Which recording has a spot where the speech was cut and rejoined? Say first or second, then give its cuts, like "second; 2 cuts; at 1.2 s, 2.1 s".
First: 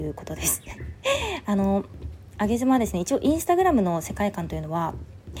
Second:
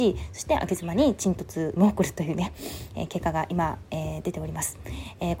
second; 1 cut; at 1.8 s